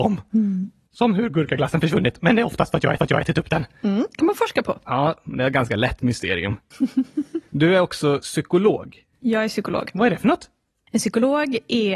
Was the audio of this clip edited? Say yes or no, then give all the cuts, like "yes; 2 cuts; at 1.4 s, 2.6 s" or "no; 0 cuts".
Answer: yes; 1 cut; at 3.0 s